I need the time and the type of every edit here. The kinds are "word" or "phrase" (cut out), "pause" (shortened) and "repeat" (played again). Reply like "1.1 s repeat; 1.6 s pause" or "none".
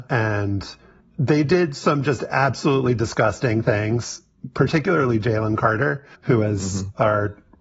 6.1 s pause